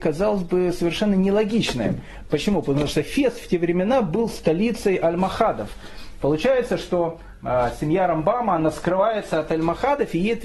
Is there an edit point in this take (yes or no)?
no